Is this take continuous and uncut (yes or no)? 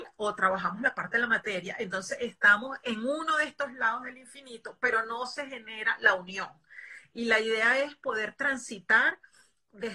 yes